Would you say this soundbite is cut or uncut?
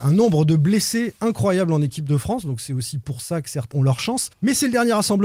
cut